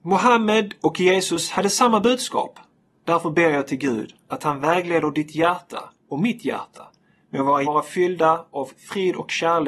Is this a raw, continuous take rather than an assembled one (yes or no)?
no